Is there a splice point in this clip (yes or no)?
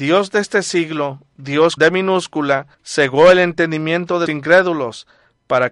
yes